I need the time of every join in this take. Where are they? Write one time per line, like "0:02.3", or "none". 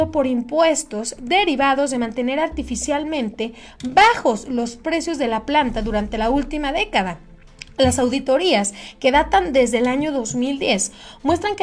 none